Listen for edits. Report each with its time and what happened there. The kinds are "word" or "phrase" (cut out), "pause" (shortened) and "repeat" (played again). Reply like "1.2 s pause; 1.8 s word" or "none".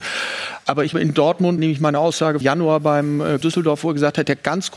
0.9 s word; 1.6 s phrase; 2.4 s phrase; 3.4 s phrase